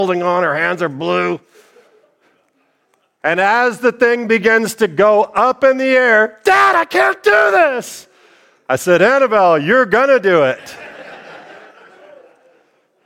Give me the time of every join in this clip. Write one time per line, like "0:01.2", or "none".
none